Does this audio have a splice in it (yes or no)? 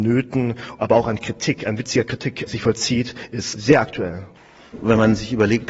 no